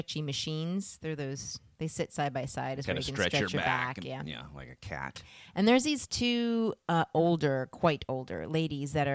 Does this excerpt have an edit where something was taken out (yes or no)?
no